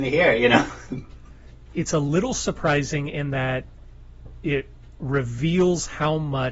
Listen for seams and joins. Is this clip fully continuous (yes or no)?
no